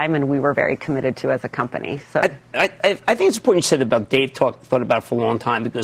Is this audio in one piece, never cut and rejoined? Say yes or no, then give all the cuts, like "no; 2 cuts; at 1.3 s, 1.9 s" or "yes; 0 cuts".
yes; 0 cuts